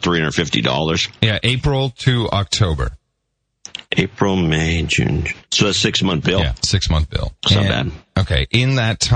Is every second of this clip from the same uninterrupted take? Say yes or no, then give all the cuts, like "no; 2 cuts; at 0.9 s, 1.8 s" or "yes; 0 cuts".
no; 3 cuts; at 3.9 s, 5.4 s, 7.4 s